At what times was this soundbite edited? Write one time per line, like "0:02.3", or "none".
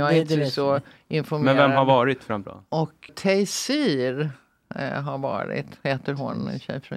0:02.4
0:03.1